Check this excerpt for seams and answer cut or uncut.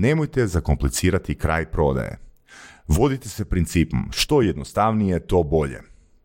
uncut